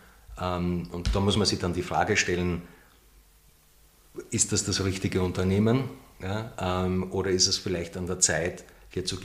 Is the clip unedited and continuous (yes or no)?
yes